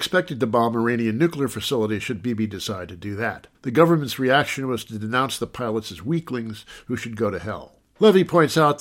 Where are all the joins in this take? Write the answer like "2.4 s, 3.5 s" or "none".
3.5 s